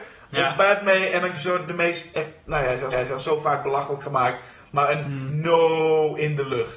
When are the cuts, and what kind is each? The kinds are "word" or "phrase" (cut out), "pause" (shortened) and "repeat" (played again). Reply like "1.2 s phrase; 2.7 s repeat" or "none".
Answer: 1.3 s word; 2.9 s repeat